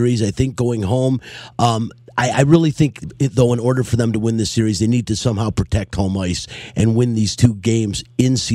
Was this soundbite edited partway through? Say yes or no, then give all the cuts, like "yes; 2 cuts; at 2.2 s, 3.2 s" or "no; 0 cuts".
no; 0 cuts